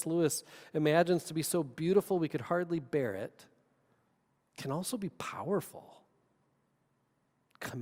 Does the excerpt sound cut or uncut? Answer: uncut